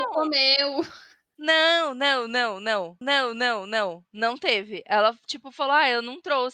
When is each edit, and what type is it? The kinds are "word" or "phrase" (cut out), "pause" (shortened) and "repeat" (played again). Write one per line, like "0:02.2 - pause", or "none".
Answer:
0:03.0 - repeat

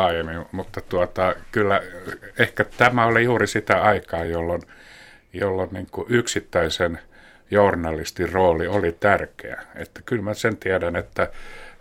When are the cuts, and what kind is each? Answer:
none

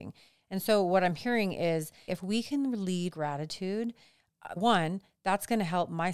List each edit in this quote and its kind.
0:02.1 - word
0:03.1 - word
0:04.6 - word

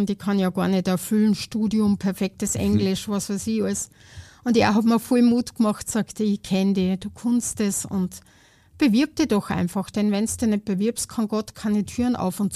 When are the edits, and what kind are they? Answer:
none

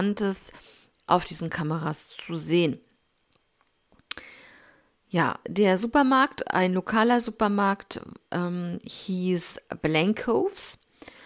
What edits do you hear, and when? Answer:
0:05.4 - word

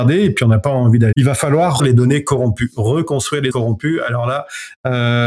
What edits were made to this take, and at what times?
0:01.1 - word
0:01.8 - word
0:03.5 - word

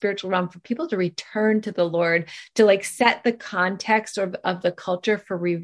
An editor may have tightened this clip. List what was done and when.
none

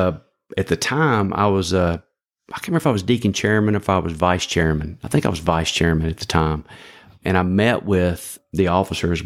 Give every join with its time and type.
none

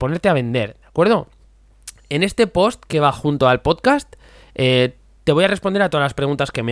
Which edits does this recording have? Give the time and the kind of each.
none

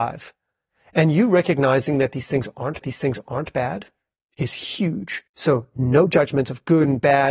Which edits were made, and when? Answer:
0:02.8 - repeat
0:05.3 - pause

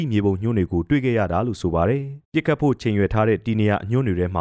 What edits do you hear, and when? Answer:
0:02.2 - pause

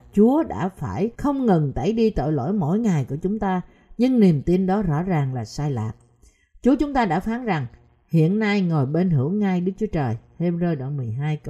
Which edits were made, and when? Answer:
0:01.1 - pause

